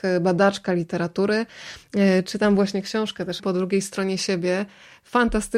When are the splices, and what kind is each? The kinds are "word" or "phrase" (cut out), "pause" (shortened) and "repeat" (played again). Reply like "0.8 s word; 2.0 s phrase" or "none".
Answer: 3.4 s phrase